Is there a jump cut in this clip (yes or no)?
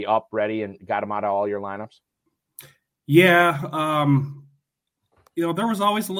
no